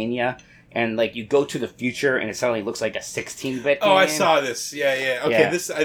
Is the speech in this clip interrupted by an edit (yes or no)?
no